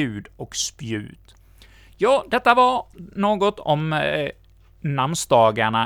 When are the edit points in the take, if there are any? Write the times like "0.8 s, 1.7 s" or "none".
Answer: none